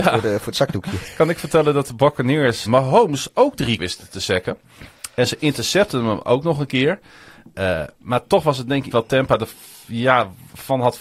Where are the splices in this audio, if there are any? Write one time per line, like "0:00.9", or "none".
0:02.7
0:03.8
0:08.9